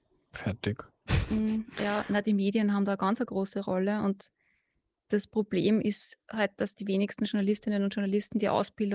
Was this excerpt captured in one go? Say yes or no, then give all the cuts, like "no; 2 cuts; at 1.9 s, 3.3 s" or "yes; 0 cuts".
yes; 0 cuts